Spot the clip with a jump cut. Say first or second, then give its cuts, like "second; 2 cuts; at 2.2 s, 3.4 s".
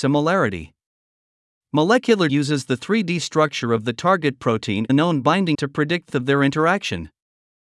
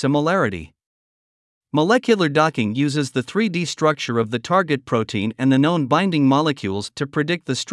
first; 4 cuts; at 2.3 s, 4.9 s, 5.5 s, 6.1 s